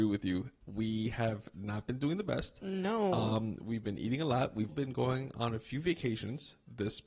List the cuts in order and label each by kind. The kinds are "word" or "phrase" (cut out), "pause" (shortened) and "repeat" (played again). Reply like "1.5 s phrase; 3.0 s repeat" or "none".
4.7 s word